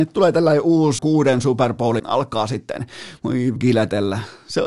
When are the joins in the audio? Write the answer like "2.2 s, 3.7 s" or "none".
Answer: 1.0 s, 2.0 s, 3.6 s

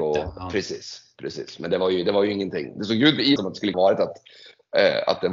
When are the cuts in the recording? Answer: 3.4 s, 3.7 s

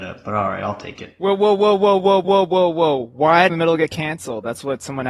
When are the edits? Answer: 2.2 s, 3.5 s

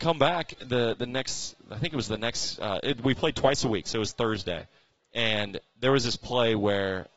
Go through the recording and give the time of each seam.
none

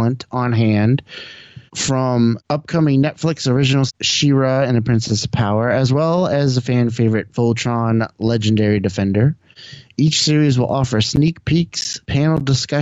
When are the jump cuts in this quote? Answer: 3.9 s

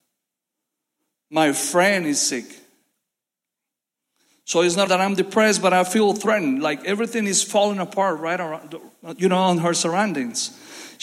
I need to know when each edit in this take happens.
4.9 s

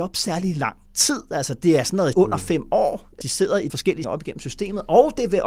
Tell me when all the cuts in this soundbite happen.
2.1 s, 3.2 s, 3.7 s, 4.0 s

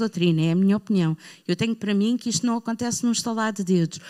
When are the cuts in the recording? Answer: none

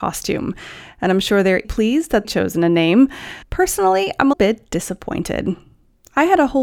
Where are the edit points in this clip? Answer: 1.6 s, 2.2 s, 3.4 s, 4.3 s

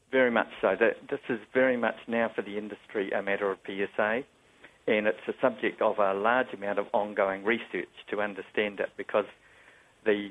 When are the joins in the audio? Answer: 3.6 s

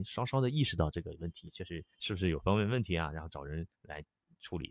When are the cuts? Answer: 1.9 s, 3.7 s

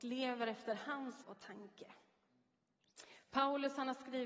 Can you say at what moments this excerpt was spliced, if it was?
1.2 s

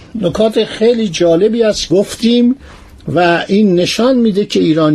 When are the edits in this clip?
1.9 s

